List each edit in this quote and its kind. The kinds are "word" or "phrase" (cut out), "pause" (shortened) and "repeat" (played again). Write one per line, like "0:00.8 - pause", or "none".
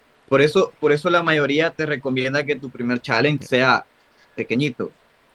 none